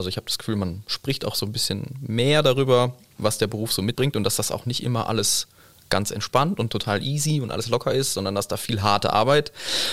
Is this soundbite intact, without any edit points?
no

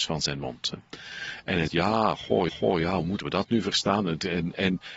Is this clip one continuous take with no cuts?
no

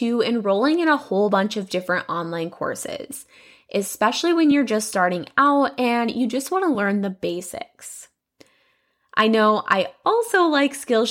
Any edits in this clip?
no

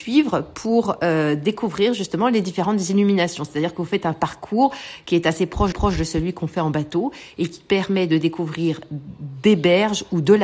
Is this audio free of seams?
no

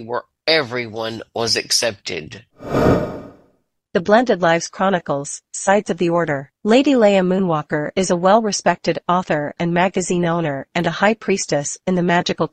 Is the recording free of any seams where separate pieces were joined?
no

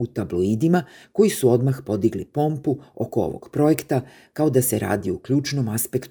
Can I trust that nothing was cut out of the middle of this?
yes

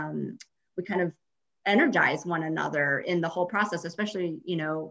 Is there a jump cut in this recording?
no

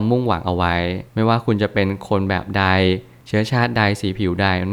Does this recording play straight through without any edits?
no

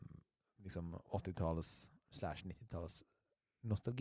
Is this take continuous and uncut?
no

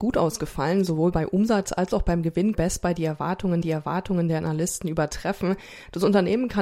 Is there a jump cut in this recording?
yes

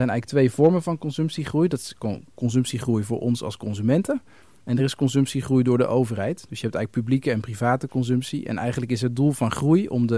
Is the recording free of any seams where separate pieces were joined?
yes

